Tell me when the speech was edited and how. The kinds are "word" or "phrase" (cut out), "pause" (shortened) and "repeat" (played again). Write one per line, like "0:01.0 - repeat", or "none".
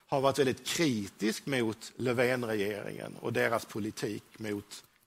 none